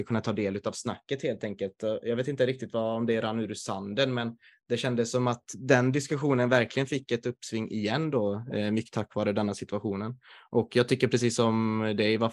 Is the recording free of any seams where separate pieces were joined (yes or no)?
yes